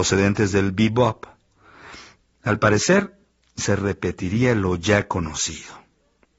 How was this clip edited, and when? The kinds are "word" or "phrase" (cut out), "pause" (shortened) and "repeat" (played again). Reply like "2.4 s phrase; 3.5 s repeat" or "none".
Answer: none

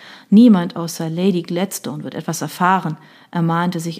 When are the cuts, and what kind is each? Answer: none

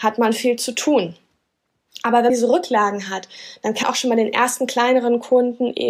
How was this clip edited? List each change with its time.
2.3 s word; 3.8 s word

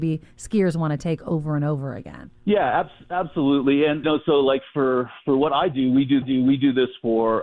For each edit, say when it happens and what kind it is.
2.4 s pause; 4.0 s word; 6.2 s repeat

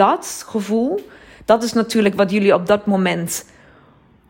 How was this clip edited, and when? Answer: none

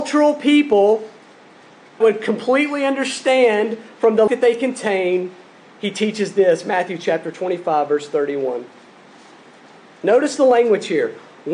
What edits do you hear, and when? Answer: 2.0 s word; 4.3 s word

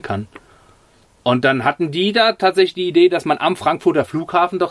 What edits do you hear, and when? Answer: none

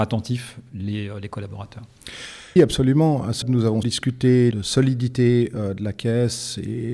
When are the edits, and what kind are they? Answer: 2.6 s word; 3.4 s word; 3.8 s word; 4.5 s phrase

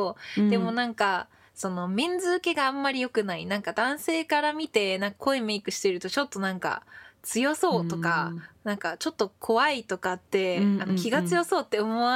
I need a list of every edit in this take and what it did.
none

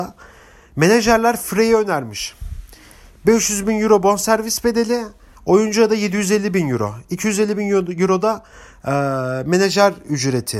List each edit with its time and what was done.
none

